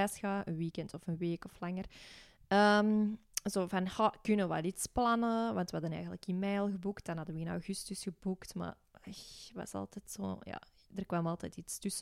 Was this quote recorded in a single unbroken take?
yes; 0 cuts

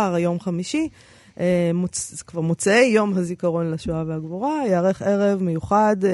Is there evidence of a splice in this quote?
no; 0 cuts

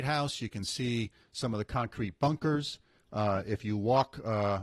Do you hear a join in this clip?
no; 0 cuts

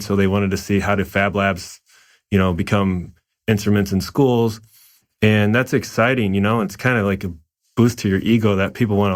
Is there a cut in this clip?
no; 0 cuts

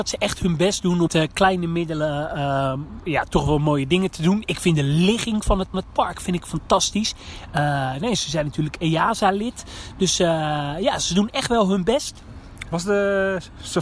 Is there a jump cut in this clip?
yes; 2 cuts; at 1.1 s, 5.7 s

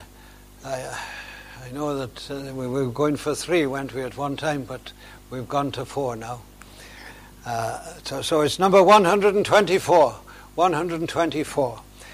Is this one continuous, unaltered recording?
yes; 0 cuts

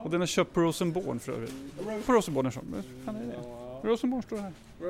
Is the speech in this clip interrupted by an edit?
yes; 1 cut; at 2.0 s

